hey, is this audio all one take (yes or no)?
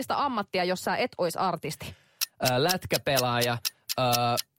yes